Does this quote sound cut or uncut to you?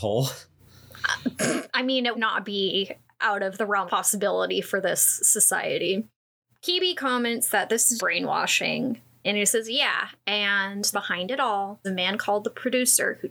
cut